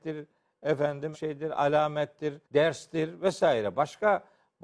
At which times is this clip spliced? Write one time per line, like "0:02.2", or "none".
0:01.1
0:02.4